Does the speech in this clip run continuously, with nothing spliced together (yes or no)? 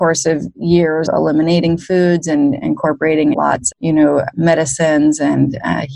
no